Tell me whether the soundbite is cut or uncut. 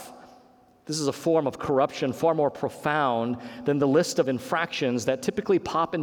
uncut